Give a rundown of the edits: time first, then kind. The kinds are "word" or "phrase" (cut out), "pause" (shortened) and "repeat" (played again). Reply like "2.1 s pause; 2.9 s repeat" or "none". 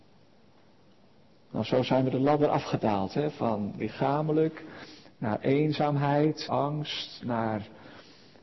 6.5 s word